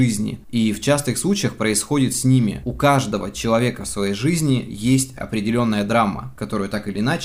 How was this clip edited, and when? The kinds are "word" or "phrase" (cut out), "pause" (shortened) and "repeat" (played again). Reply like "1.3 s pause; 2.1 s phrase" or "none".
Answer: none